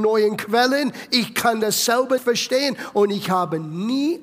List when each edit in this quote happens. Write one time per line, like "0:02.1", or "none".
0:02.2